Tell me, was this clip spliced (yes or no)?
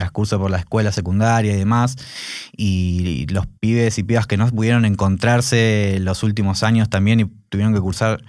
yes